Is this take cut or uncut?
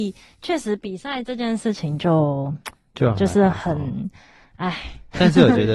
uncut